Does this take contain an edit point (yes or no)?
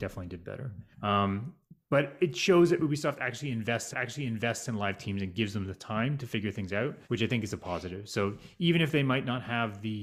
yes